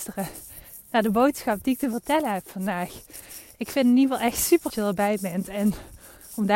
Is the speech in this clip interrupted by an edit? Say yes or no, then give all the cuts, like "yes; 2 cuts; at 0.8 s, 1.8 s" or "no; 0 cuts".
yes; 1 cut; at 4.7 s